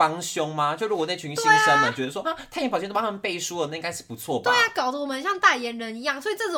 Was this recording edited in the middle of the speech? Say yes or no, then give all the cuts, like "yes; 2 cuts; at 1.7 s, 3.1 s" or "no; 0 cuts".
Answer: yes; 1 cut; at 2.2 s